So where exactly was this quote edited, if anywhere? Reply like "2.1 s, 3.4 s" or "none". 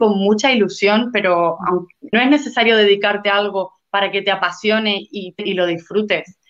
2.1 s, 5.4 s